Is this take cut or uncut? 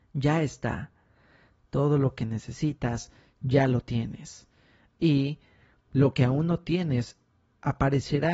uncut